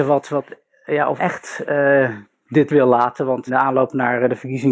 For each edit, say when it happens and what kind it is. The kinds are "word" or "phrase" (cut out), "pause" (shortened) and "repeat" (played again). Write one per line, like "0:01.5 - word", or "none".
0:01.2 - word
0:02.7 - word
0:03.5 - word